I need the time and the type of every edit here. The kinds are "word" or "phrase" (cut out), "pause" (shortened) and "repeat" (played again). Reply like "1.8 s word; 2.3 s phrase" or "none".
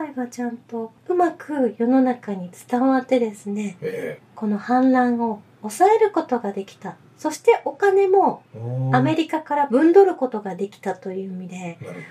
1.0 s pause